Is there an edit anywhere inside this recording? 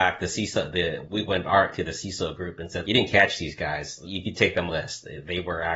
yes; 5 cuts; at 1.0 s, 1.7 s, 2.9 s, 4.0 s, 4.7 s

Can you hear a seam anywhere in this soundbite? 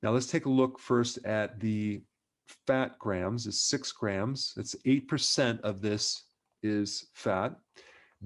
no; 0 cuts

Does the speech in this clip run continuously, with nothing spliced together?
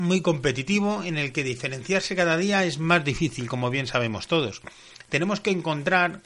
yes; 0 cuts

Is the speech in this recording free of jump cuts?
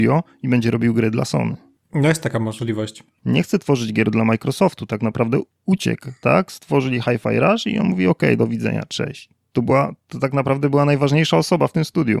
yes; 0 cuts

